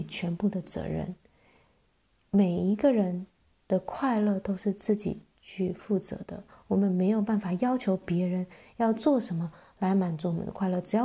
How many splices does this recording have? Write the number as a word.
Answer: zero